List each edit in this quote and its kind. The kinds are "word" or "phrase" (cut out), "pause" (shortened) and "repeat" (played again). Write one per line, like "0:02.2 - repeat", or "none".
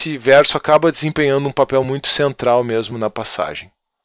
none